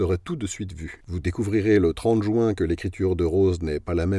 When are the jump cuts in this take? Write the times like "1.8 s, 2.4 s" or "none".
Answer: 1.0 s

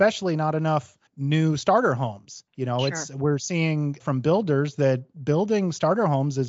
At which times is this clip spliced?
1.1 s, 2.5 s, 4.0 s

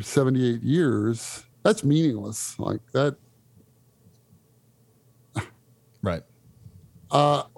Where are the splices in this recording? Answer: 1.5 s

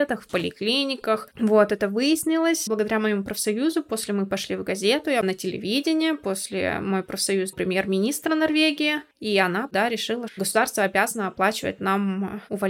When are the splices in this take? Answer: 2.7 s, 7.5 s, 9.1 s, 10.3 s

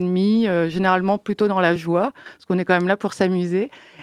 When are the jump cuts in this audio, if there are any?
none

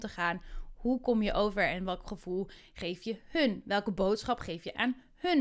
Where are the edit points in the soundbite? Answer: none

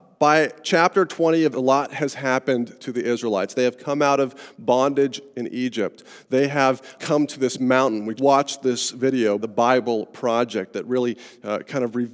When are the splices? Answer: 1.5 s, 7.0 s, 8.2 s, 9.4 s

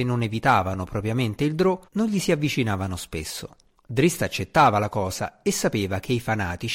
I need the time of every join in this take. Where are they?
1.9 s, 3.7 s

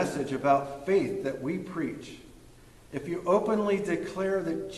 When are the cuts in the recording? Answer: none

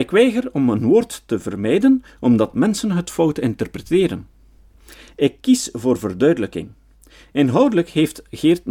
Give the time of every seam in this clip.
none

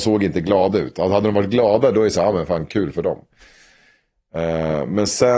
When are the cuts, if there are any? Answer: none

